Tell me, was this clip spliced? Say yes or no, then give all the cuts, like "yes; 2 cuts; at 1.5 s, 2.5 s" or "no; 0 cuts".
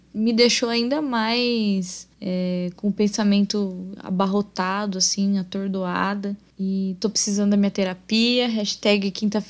yes; 1 cut; at 2.1 s